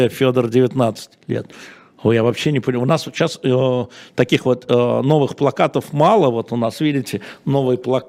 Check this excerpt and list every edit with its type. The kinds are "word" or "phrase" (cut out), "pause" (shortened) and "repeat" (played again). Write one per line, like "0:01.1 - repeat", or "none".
none